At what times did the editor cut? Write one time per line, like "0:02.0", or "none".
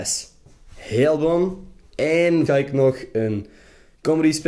0:02.5